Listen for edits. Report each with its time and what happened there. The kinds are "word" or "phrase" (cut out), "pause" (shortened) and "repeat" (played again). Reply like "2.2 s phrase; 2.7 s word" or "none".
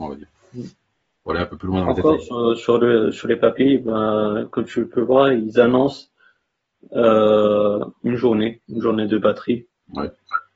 none